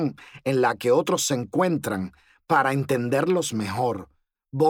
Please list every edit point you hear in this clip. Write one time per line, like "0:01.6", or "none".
none